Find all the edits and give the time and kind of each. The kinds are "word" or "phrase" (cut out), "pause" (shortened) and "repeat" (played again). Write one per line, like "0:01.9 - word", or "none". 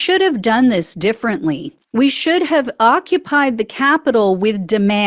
0:01.8 - pause

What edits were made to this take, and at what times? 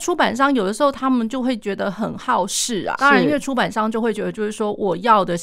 0:03.0 - word

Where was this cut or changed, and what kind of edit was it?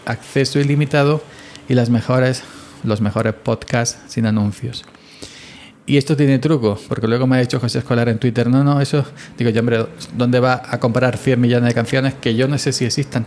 none

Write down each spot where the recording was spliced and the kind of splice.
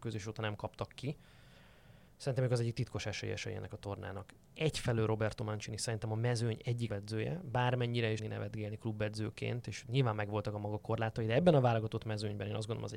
0:02.1 - pause
0:06.9 - word
0:08.2 - phrase

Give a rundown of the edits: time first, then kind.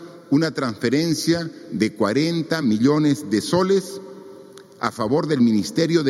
none

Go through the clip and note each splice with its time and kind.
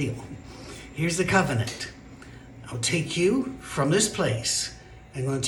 none

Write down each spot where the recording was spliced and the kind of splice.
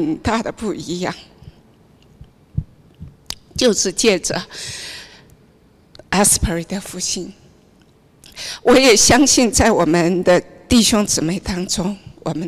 none

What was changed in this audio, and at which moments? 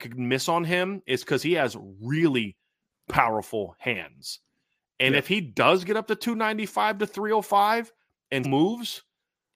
0:08.4 - word

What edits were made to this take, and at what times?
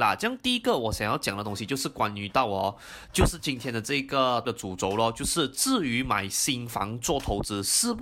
0:04.4 - word

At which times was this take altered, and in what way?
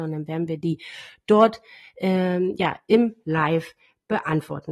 none

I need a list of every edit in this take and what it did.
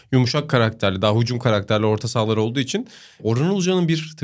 none

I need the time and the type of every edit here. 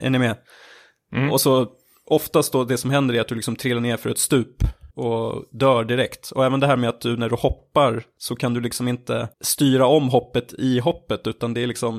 0:04.9 - pause
0:09.3 - pause

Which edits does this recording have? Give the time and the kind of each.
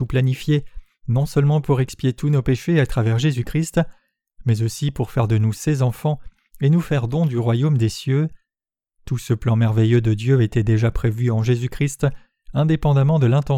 none

